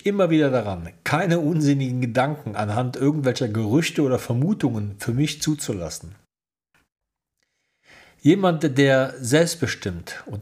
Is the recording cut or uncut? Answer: uncut